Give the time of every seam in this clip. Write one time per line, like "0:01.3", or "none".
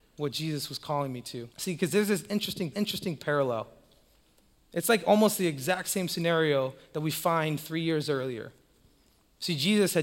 0:01.5
0:02.7